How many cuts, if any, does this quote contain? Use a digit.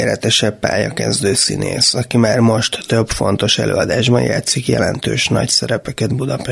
0